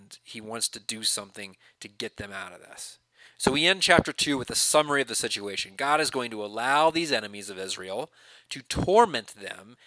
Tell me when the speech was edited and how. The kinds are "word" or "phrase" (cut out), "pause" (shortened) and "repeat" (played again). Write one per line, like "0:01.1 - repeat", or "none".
none